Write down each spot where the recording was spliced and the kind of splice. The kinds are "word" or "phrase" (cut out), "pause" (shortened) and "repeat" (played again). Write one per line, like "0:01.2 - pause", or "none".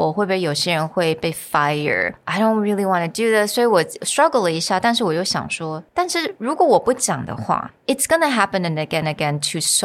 0:05.9 - pause